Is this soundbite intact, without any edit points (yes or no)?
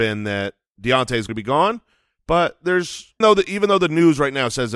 no